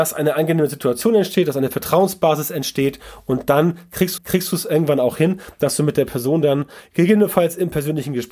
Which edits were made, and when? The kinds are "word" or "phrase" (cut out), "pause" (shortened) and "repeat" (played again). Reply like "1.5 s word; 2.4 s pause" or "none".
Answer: 4.2 s repeat